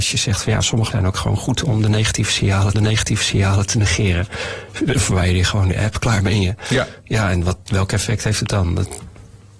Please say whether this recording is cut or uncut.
cut